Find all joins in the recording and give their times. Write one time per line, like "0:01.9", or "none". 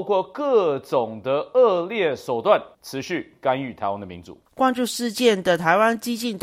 0:02.7
0:04.5